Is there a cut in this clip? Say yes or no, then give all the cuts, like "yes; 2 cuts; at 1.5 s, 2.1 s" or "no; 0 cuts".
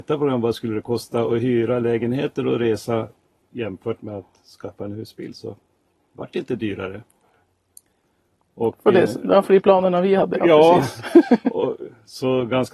no; 0 cuts